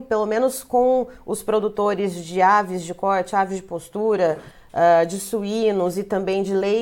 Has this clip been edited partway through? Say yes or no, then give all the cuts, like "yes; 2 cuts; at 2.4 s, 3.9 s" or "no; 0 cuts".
no; 0 cuts